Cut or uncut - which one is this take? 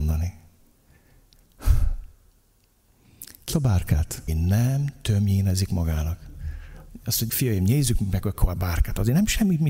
cut